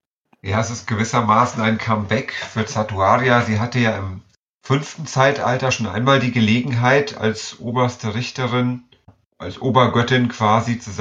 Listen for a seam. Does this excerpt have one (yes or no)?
no